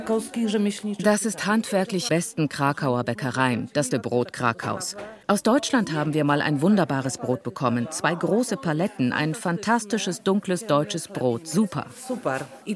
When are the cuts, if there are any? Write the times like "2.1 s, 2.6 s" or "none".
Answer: 2.1 s, 3.9 s, 5.2 s